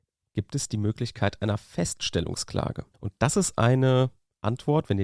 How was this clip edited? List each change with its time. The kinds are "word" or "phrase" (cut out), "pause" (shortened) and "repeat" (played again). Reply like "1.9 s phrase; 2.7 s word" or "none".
2.9 s pause